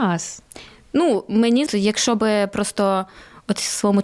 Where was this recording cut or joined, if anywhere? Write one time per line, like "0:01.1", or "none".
0:01.7

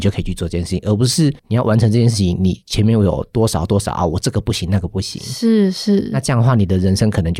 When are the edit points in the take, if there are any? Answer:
0:01.4

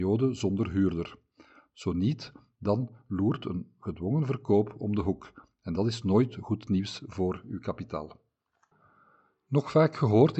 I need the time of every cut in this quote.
none

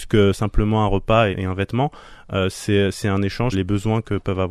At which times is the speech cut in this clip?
0:01.3
0:03.5

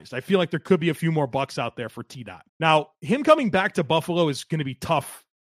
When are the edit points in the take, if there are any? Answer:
0:02.5

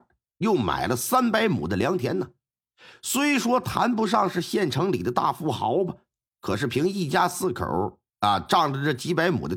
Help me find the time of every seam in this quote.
none

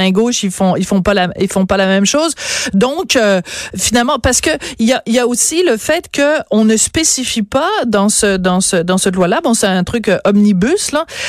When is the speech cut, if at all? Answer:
none

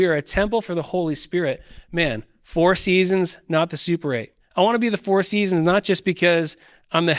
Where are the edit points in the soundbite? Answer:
0:04.4

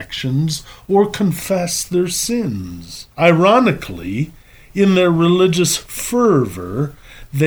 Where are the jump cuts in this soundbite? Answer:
0:03.1

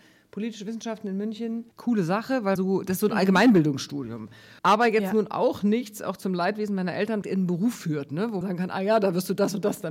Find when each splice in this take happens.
0:01.7
0:02.6
0:04.6
0:07.2
0:08.4

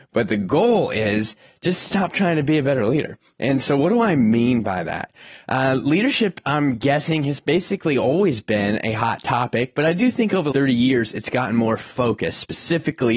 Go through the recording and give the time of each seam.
0:10.5

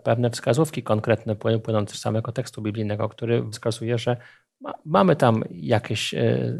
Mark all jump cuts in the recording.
0:01.9
0:03.5

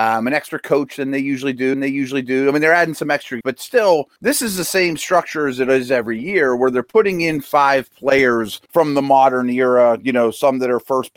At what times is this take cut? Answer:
0:01.7
0:03.4
0:04.2
0:08.7

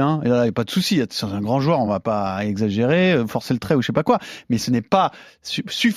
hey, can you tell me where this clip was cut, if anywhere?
none

